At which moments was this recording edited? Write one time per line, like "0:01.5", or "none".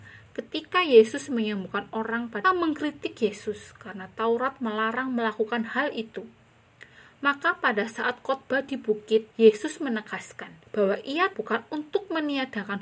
0:02.4
0:09.3
0:10.7
0:11.3